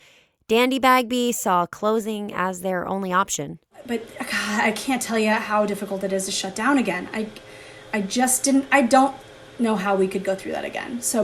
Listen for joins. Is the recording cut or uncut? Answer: uncut